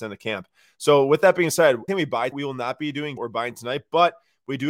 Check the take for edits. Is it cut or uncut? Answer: cut